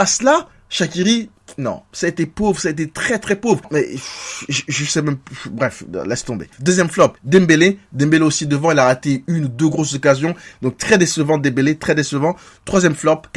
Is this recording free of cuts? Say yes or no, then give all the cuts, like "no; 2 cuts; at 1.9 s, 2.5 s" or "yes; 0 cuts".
no; 3 cuts; at 4.5 s, 6.5 s, 7.2 s